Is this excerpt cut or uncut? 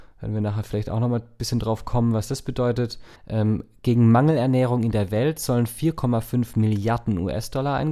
cut